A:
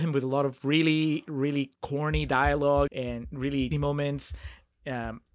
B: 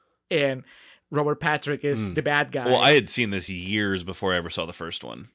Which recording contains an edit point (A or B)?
A